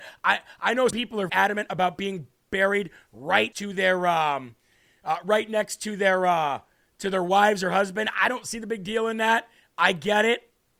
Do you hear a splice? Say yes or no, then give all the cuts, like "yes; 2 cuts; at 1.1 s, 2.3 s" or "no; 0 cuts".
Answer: yes; 3 cuts; at 0.9 s, 1.3 s, 3.5 s